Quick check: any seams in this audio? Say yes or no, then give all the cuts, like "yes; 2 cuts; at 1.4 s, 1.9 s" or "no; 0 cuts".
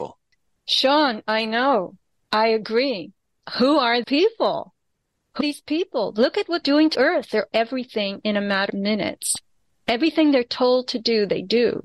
yes; 6 cuts; at 4.0 s, 5.4 s, 6.6 s, 6.9 s, 7.5 s, 8.7 s